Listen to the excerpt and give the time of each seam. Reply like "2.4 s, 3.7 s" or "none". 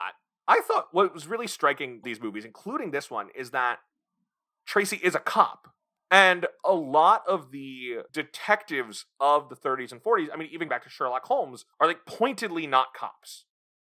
2.0 s, 8.1 s, 10.7 s, 11.7 s